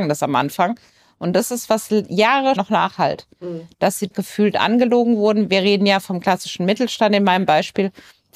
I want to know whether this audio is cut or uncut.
cut